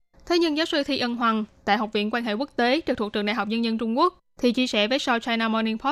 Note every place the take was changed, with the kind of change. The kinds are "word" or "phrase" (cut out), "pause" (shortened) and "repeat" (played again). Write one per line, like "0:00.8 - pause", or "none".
none